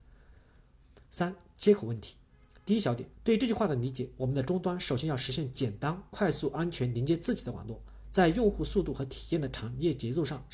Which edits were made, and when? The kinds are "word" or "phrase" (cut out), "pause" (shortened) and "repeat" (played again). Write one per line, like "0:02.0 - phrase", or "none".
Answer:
0:01.0 - pause
0:03.1 - pause